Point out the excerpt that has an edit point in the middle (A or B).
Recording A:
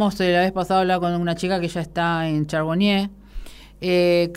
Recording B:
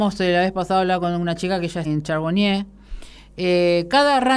B